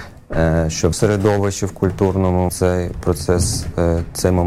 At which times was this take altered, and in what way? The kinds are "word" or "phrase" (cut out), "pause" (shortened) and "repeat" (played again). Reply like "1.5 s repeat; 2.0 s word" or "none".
0.9 s word; 2.5 s word